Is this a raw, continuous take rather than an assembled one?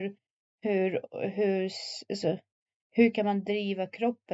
yes; 0 cuts

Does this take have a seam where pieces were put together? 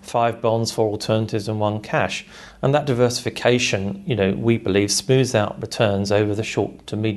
no; 0 cuts

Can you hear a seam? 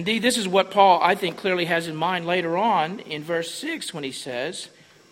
no; 0 cuts

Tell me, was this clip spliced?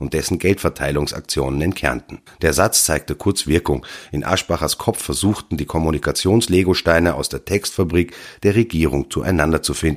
yes; 1 cut; at 2.3 s

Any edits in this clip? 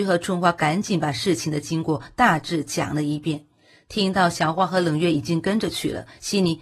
no; 0 cuts

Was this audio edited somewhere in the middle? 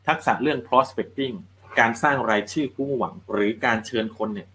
yes; 1 cut; at 3.2 s

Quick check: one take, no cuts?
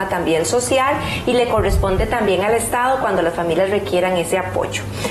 yes; 0 cuts

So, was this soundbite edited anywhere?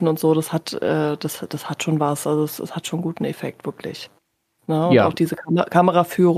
no; 0 cuts

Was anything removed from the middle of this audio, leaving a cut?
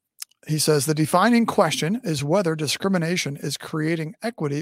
no; 0 cuts

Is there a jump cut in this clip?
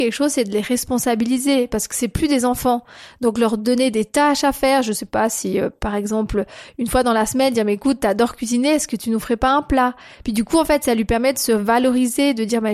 no; 0 cuts

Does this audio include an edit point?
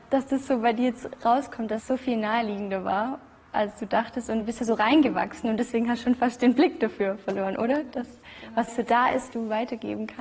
yes; 2 cuts; at 8.7 s, 9.3 s

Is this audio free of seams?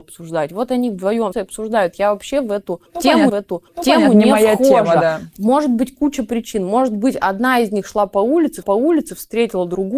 no; 3 cuts; at 1.3 s, 3.3 s, 8.6 s

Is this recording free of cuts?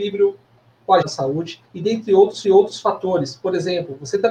no; 3 cuts; at 1.0 s, 1.6 s, 2.4 s

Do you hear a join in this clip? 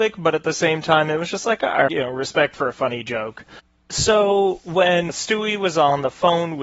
yes; 2 cuts; at 1.9 s, 5.1 s

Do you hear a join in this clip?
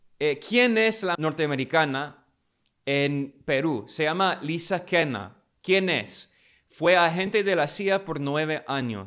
yes; 1 cut; at 1.1 s

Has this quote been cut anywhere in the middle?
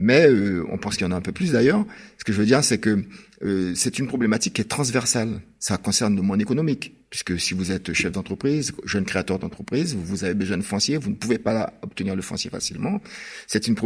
no; 0 cuts

